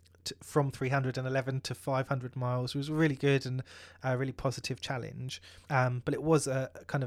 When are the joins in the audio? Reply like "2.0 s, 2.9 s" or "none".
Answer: 5.6 s